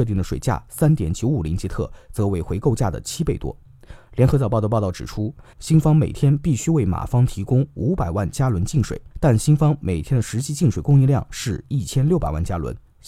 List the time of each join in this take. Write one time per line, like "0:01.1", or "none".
0:05.5
0:09.1